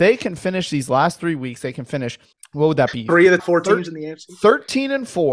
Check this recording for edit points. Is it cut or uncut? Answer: cut